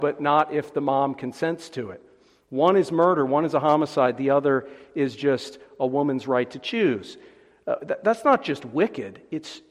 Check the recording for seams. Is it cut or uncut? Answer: uncut